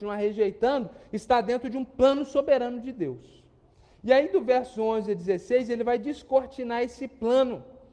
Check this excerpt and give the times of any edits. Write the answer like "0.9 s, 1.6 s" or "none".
none